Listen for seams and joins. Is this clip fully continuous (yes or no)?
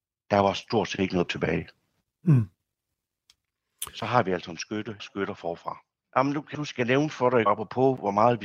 no